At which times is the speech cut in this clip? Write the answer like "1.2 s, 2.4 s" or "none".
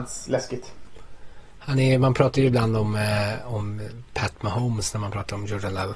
none